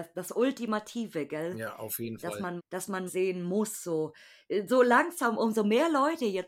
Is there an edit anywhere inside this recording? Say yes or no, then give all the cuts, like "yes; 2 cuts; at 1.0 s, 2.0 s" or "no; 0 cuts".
yes; 2 cuts; at 2.6 s, 3.1 s